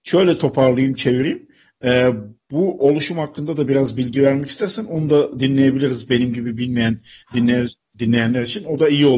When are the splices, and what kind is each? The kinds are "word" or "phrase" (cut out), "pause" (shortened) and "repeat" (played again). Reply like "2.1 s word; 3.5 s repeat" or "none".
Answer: none